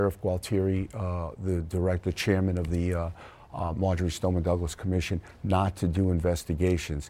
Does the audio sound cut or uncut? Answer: uncut